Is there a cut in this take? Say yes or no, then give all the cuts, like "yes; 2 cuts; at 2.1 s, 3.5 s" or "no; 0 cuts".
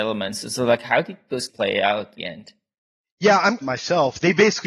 yes; 4 cuts; at 1.5 s, 2.2 s, 2.8 s, 3.6 s